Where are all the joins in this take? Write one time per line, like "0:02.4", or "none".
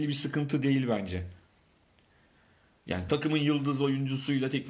none